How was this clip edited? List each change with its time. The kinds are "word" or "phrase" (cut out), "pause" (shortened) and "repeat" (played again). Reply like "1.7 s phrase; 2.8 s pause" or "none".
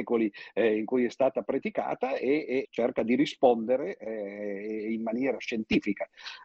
2.6 s phrase